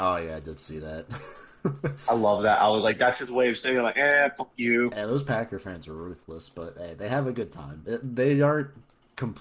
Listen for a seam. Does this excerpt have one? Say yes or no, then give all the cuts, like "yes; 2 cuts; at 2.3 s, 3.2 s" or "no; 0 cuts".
no; 0 cuts